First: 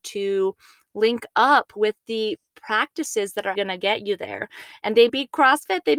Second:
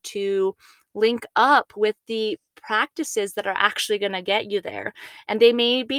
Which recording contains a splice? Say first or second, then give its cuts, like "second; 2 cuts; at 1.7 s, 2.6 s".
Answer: first; 2 cuts; at 3.5 s, 5.1 s